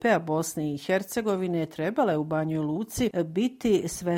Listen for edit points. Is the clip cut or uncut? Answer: uncut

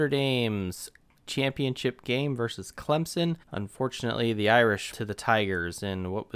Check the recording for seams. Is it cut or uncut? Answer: cut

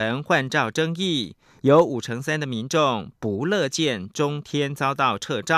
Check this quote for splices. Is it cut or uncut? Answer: uncut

